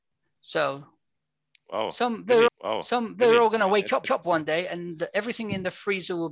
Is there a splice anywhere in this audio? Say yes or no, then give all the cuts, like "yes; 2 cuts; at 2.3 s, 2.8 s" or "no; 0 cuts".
yes; 2 cuts; at 2.5 s, 4.0 s